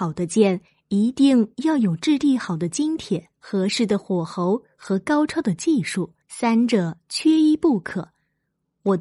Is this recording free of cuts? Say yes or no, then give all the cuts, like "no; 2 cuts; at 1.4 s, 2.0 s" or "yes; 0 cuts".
no; 2 cuts; at 3.3 s, 6.2 s